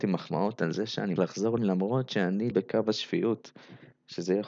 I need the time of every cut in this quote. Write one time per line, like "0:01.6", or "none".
0:01.2
0:01.6
0:02.5

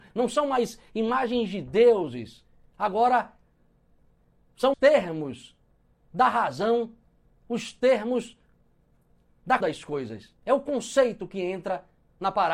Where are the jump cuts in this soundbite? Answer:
0:04.7
0:09.6
0:10.4

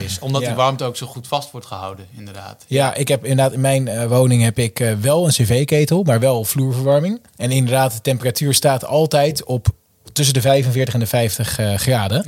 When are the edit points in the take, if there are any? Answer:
0:07.3

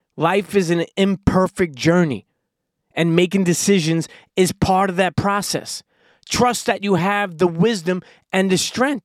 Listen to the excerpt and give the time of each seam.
none

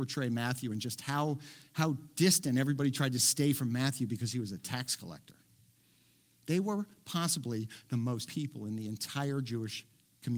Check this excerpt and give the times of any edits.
0:08.3

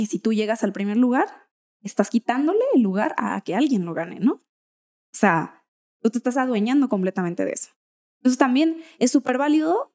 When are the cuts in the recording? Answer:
none

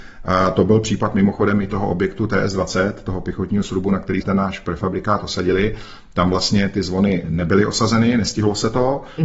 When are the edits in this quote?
0:04.2

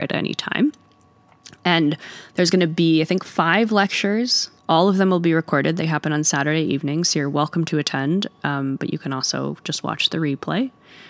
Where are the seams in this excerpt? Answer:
0:04.6

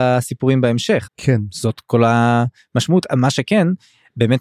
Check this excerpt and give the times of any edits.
0:01.1

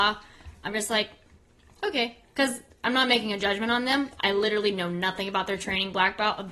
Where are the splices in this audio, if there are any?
none

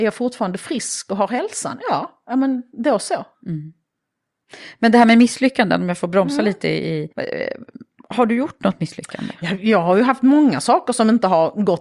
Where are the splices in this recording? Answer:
0:03.3
0:07.1

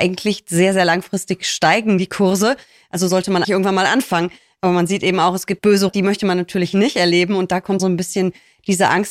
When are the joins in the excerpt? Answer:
0:03.4
0:05.6
0:05.9
0:07.8

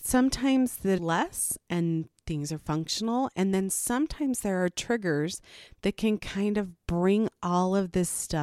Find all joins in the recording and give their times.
0:01.0

